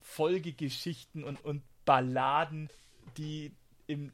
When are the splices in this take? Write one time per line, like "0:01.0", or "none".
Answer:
0:01.4